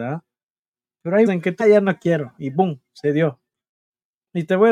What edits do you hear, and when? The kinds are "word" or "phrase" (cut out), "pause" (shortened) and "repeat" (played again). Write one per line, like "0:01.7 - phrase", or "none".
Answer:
0:01.3 - word
0:01.6 - phrase